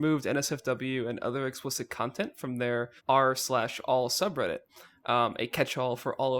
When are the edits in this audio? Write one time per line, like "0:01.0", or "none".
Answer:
0:03.0